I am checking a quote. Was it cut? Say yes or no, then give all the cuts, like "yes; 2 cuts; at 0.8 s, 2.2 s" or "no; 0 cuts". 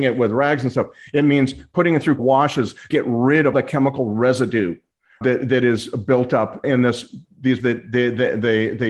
yes; 6 cuts; at 2.2 s, 2.9 s, 3.5 s, 5.2 s, 6.6 s, 7.6 s